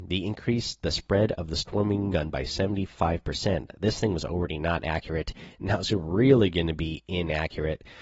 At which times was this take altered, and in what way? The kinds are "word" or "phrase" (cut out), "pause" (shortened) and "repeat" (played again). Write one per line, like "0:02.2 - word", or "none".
0:02.1 - word